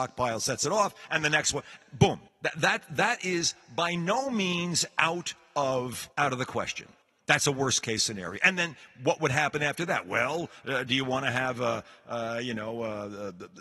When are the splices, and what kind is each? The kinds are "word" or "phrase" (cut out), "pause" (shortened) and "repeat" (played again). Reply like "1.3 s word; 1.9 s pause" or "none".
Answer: 2.3 s pause; 6.1 s pause; 7.0 s pause

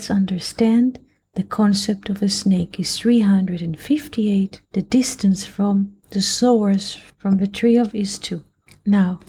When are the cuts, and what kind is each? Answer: 4.6 s pause; 6.0 s pause; 7.9 s word

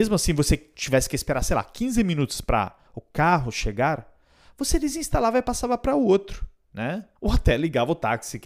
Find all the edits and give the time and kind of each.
7.2 s pause

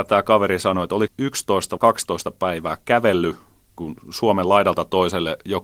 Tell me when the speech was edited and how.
1.1 s word; 1.8 s word; 3.8 s word

